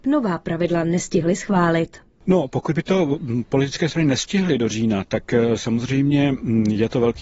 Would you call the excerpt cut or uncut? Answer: uncut